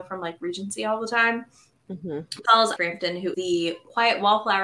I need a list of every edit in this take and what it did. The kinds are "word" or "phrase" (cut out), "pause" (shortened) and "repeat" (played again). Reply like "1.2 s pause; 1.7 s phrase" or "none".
2.4 s word; 2.8 s word; 3.3 s word